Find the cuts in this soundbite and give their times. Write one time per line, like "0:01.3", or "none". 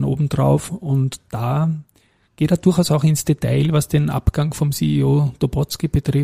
none

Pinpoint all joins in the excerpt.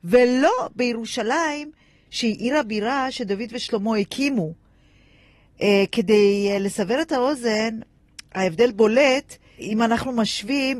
none

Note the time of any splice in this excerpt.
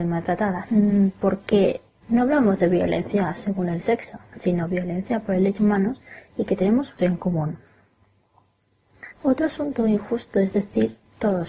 0:04.3
0:05.6
0:07.0
0:09.1

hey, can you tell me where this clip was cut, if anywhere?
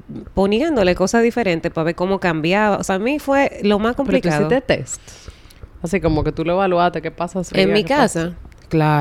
0:02.9
0:07.5

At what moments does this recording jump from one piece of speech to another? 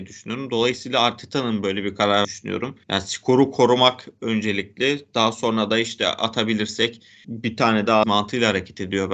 0:02.2
0:02.8
0:07.2
0:08.0

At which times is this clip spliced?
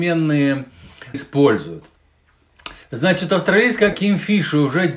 0:01.1
0:02.8
0:03.9

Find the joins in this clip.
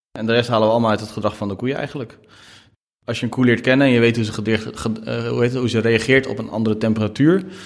none

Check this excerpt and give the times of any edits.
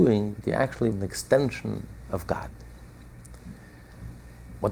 0:00.9

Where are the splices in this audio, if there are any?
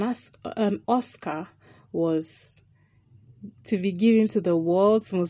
none

